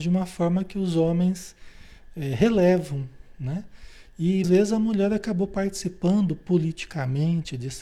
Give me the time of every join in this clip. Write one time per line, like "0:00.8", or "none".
0:04.4